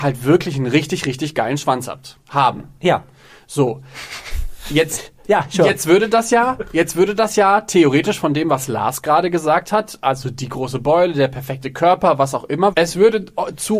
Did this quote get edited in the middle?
no; 0 cuts

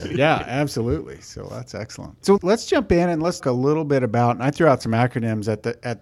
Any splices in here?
yes; 2 cuts; at 2.4 s, 3.4 s

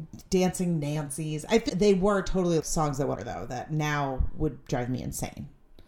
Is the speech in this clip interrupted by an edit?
yes; 3 cuts; at 1.7 s, 2.6 s, 3.1 s

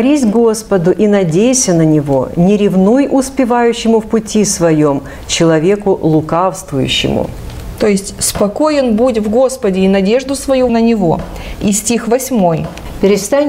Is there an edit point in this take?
yes; 1 cut; at 10.7 s

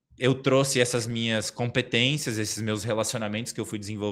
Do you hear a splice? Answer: no; 0 cuts

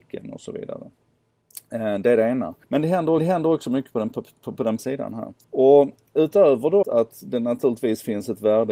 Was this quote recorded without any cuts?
no; 5 cuts; at 2.6 s, 3.2 s, 4.8 s, 5.4 s, 6.8 s

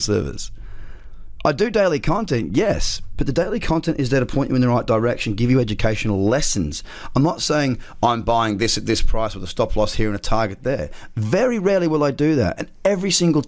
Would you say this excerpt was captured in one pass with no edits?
yes; 0 cuts

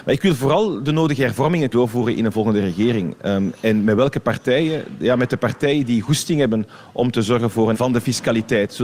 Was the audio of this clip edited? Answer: yes; 2 cuts; at 1.7 s, 7.7 s

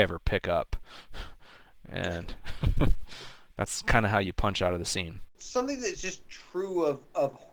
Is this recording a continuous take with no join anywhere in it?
no; 1 cut; at 5.3 s

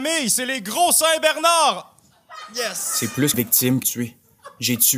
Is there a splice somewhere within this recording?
yes; 2 cuts; at 3.3 s, 3.8 s

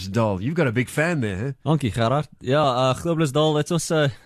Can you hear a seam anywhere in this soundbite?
no; 0 cuts

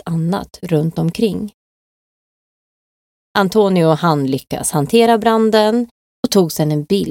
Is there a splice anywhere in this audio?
no; 0 cuts

